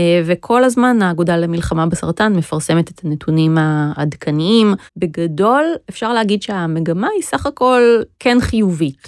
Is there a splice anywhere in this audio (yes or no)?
yes